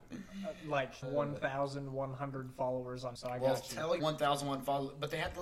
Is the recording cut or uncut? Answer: cut